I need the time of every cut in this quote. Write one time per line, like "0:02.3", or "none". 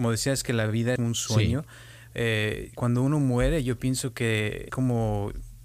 0:01.0
0:02.7
0:04.7